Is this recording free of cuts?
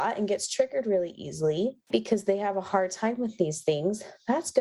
no; 1 cut; at 1.8 s

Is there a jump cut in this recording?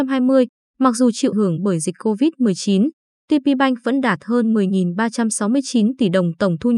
yes; 1 cut; at 1.3 s

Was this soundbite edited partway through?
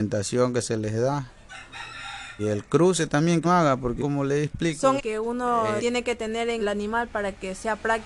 yes; 6 cuts; at 2.4 s, 3.4 s, 4.0 s, 5.0 s, 5.8 s, 6.6 s

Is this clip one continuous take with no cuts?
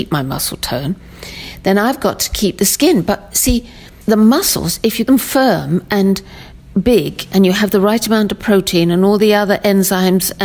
no; 2 cuts; at 4.0 s, 5.1 s

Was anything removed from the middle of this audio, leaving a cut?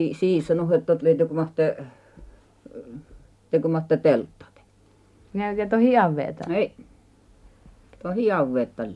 no; 0 cuts

